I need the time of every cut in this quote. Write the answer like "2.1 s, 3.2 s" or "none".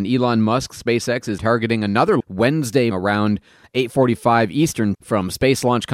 1.4 s, 2.2 s, 2.9 s, 4.9 s